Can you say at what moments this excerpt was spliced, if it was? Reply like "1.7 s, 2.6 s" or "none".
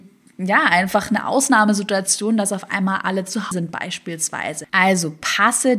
3.5 s, 4.7 s

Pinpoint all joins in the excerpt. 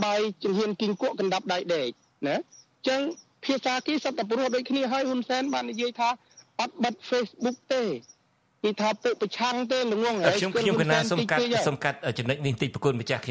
none

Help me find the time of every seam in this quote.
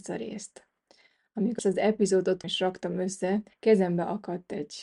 1.6 s, 2.4 s, 3.5 s

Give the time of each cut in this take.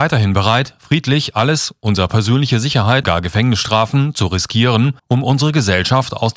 3.0 s, 5.0 s

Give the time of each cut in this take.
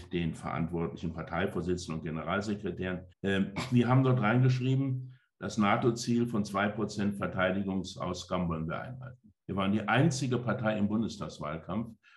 3.1 s, 9.4 s

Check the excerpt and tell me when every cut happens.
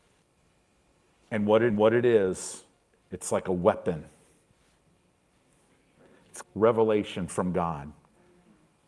1.7 s, 6.4 s

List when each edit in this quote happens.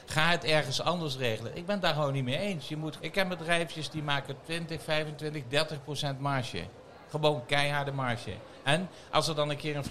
3.0 s

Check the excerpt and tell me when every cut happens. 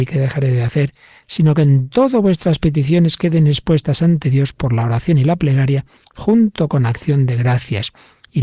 none

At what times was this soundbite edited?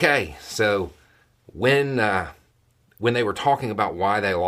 1.2 s, 2.5 s

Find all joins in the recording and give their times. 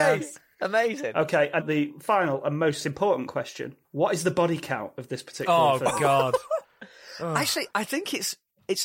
1.6 s, 3.8 s, 6.6 s, 7.7 s

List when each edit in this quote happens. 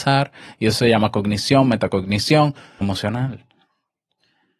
2.8 s

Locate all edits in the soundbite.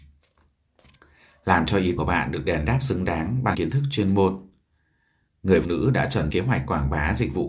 2.0 s, 3.5 s, 5.6 s, 6.3 s

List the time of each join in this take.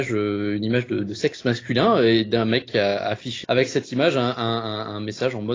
3.4 s

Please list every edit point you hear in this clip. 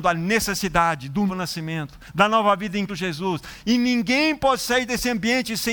1.3 s, 2.9 s

